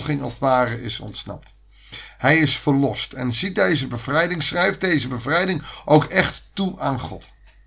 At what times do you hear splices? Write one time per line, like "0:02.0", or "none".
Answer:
none